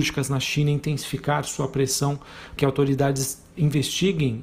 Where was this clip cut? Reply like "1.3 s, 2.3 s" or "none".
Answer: 2.6 s